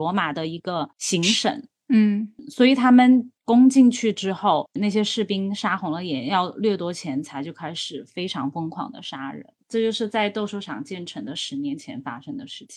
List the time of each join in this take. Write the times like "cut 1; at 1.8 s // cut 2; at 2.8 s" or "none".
cut 1; at 0.9 s